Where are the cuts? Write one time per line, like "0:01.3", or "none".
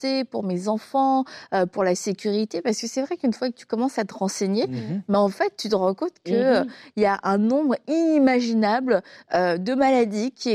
none